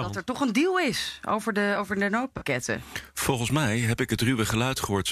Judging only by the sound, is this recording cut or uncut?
uncut